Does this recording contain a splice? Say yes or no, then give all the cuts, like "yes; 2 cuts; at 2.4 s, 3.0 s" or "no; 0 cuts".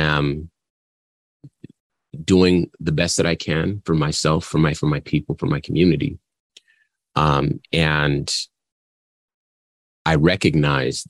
yes; 1 cut; at 4.7 s